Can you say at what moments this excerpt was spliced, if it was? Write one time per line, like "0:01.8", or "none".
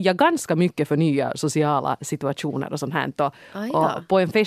none